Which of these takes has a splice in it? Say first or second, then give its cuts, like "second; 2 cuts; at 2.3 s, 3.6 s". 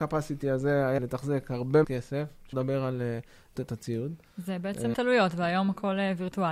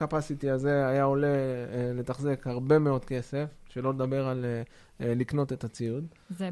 first; 5 cuts; at 1.0 s, 1.8 s, 2.5 s, 3.6 s, 4.9 s